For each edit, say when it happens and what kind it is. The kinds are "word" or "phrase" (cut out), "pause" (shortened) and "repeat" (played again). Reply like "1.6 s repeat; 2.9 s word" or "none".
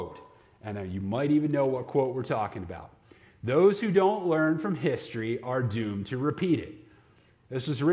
none